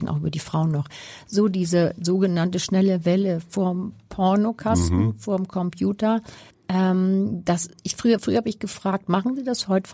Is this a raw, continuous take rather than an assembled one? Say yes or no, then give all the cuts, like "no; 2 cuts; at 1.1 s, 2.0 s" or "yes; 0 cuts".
no; 2 cuts; at 6.5 s, 8.2 s